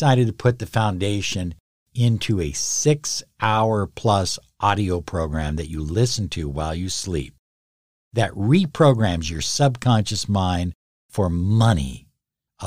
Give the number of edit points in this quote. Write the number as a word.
zero